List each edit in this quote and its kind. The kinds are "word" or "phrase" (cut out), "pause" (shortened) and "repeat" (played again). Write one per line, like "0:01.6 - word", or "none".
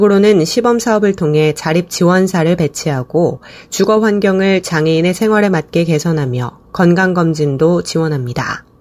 none